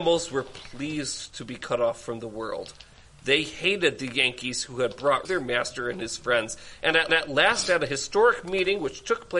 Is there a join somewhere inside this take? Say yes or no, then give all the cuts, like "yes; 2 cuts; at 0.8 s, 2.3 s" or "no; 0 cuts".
yes; 2 cuts; at 5.2 s, 7.1 s